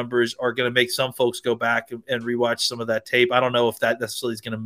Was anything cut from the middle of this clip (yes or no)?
no